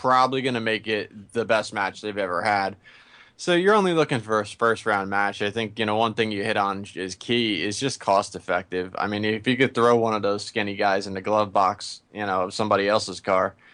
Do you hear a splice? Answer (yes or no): no